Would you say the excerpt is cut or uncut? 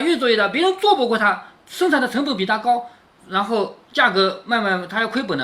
cut